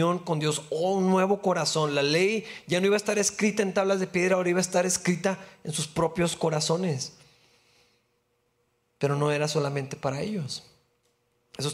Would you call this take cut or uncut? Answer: uncut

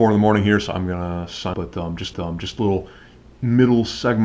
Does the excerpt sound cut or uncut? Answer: cut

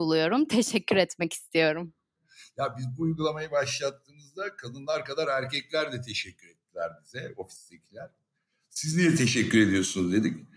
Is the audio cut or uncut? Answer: uncut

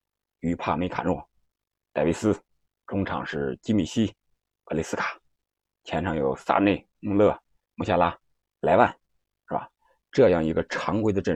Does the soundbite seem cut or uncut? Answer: uncut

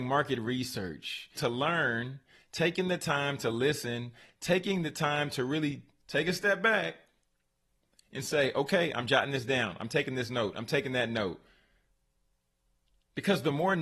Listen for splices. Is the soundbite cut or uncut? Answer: cut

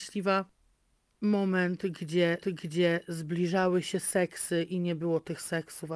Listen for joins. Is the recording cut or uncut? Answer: cut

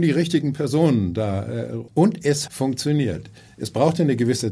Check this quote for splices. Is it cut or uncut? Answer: cut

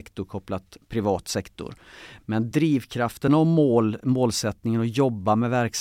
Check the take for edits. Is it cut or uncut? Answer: uncut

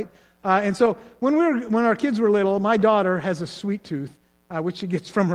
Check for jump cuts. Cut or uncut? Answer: uncut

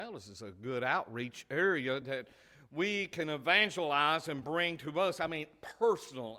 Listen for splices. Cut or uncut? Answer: uncut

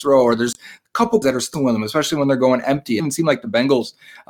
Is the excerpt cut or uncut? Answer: cut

